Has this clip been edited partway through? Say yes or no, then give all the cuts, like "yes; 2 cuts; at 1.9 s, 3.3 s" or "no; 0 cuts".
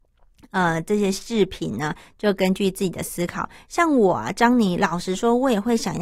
no; 0 cuts